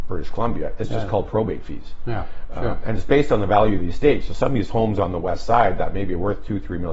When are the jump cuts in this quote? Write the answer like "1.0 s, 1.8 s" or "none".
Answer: none